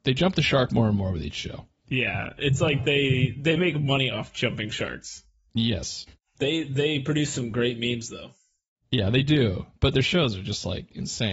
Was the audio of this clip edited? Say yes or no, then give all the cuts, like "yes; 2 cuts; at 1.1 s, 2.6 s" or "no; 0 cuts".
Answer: no; 0 cuts